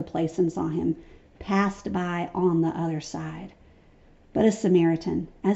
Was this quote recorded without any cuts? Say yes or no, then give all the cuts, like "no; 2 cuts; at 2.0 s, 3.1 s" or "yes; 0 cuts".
yes; 0 cuts